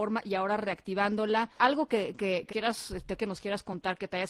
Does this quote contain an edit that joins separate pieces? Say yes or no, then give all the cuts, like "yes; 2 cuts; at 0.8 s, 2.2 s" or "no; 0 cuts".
yes; 3 cuts; at 1.6 s, 2.5 s, 3.2 s